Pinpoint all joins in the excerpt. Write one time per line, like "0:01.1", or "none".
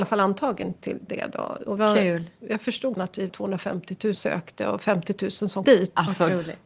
0:01.1
0:01.8
0:02.9
0:03.3
0:04.1
0:05.6